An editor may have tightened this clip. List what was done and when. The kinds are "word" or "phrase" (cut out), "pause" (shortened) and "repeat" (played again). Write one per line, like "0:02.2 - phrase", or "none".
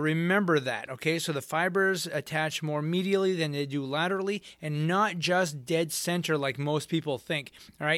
none